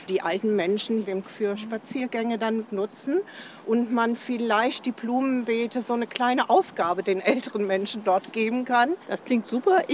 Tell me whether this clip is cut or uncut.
cut